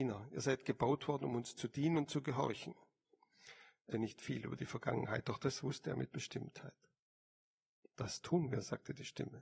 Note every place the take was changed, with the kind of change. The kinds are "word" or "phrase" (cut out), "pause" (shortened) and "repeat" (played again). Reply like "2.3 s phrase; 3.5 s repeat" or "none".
3.9 s word